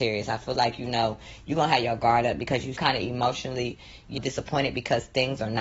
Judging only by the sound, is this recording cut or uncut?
cut